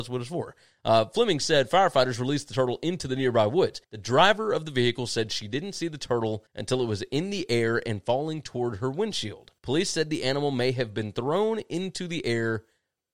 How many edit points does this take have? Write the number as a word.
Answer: three